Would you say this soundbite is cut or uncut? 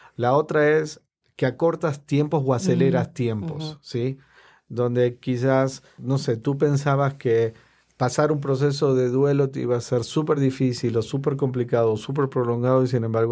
uncut